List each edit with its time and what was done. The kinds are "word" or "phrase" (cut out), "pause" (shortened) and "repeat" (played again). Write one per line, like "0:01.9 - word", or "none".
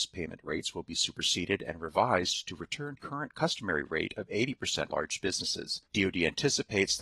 0:03.0 - phrase
0:04.9 - word
0:05.9 - pause